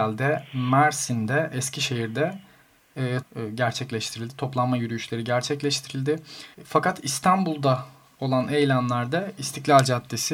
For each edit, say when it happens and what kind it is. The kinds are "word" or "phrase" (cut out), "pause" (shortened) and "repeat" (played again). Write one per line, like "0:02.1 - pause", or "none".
0:03.2 - word
0:06.5 - pause